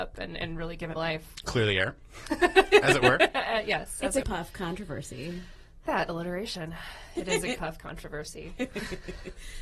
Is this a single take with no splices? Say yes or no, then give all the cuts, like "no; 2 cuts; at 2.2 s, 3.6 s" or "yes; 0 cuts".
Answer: no; 4 cuts; at 1.0 s, 4.2 s, 5.9 s, 7.6 s